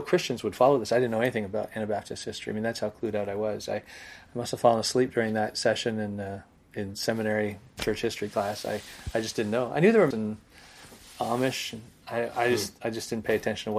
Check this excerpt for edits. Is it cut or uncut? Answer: cut